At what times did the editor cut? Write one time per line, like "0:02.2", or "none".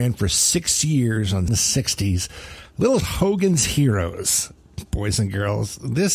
0:01.5
0:03.0